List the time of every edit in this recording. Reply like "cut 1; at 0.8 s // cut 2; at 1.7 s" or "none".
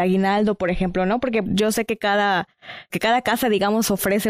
cut 1; at 1.4 s // cut 2; at 2.9 s